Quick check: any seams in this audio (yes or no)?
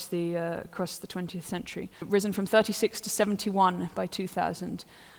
yes